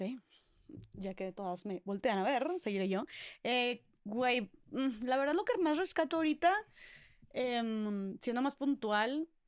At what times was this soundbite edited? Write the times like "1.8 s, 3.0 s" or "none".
none